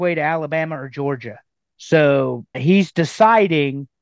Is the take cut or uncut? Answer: cut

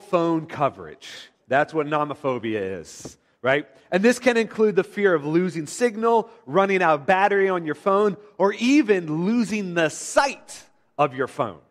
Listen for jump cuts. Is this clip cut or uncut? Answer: cut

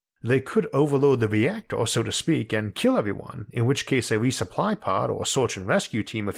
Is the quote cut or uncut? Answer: uncut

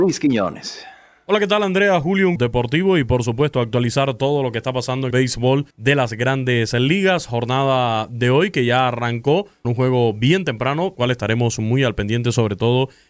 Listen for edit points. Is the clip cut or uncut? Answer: cut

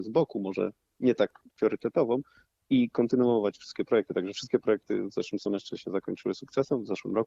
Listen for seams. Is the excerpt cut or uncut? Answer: uncut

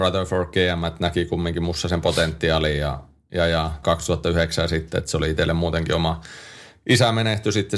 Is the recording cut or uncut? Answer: cut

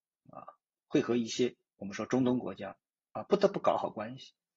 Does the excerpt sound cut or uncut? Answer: uncut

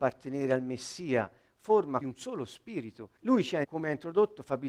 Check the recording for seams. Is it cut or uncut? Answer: cut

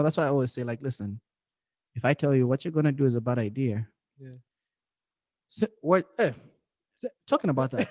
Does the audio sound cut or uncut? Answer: uncut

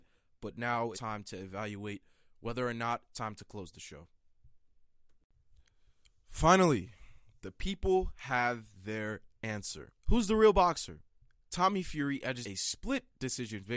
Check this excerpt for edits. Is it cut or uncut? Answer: cut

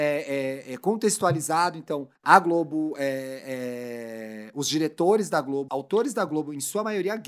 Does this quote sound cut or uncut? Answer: cut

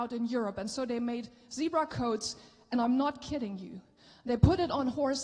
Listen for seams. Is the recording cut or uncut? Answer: uncut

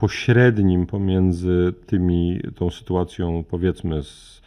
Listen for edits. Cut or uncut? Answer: uncut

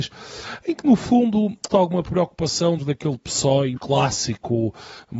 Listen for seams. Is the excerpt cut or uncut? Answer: cut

